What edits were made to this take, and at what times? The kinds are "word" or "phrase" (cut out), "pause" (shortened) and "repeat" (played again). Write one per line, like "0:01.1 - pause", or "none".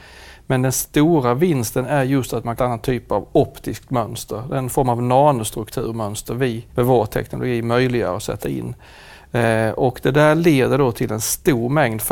0:02.6 - phrase
0:06.7 - pause